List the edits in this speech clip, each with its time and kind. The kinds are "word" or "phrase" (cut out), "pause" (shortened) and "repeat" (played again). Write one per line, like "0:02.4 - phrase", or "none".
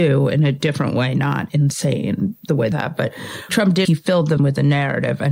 0:02.7 - word
0:03.5 - word
0:03.8 - word
0:04.4 - word